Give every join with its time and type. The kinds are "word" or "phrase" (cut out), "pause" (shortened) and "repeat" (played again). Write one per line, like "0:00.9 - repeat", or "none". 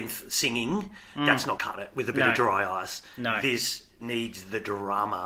0:01.6 - word